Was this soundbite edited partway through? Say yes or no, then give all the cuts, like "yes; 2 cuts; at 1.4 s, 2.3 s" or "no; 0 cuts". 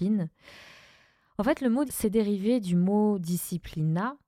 yes; 1 cut; at 1.9 s